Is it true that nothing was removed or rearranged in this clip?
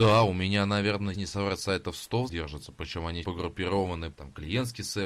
no; 4 cuts; at 1.1 s, 2.3 s, 3.2 s, 4.1 s

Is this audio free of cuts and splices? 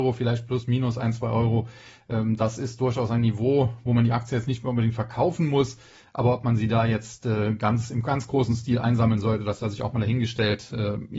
yes; 0 cuts

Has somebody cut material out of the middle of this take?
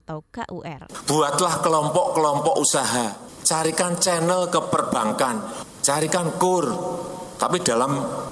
no; 0 cuts

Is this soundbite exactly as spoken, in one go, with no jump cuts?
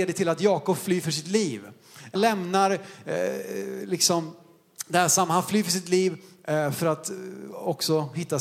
no; 1 cut; at 2.1 s

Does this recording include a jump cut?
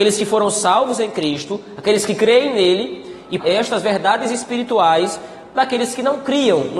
yes; 1 cut; at 3.4 s

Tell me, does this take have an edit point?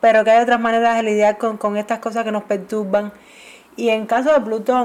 no; 0 cuts

